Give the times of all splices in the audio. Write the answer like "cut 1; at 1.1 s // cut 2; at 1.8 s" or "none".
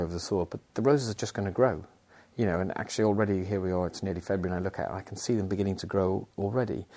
none